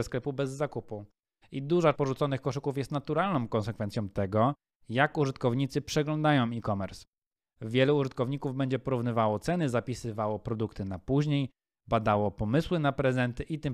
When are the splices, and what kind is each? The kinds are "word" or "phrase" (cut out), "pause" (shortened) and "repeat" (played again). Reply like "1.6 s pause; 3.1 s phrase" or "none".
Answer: 1.9 s word